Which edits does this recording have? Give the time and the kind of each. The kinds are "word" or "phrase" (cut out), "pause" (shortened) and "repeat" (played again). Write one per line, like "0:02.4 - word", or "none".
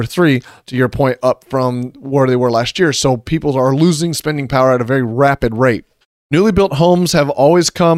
0:06.0 - pause